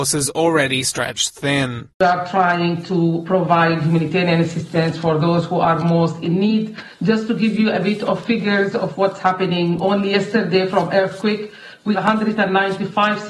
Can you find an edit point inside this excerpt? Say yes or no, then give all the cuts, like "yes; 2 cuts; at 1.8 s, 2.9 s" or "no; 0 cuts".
yes; 2 cuts; at 1.9 s, 11.9 s